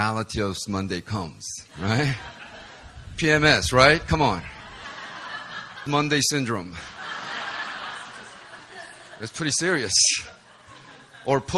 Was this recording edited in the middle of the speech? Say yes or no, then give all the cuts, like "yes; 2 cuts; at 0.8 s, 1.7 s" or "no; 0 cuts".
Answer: yes; 2 cuts; at 1.7 s, 5.9 s